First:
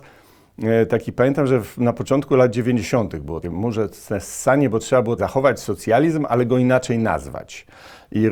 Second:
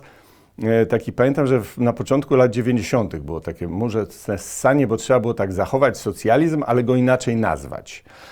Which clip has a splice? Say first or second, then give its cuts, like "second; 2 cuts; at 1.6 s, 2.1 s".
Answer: first; 2 cuts; at 3.4 s, 5.2 s